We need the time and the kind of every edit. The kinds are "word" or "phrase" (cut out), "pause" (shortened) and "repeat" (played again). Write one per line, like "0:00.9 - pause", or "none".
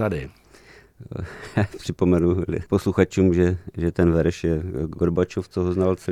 0:02.7 - pause